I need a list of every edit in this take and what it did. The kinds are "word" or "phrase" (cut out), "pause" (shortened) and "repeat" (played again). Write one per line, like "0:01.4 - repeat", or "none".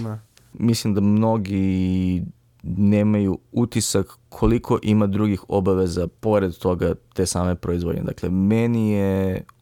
0:06.2 - pause